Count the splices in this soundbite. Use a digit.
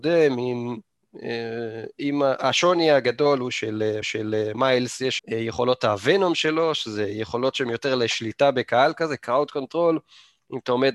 2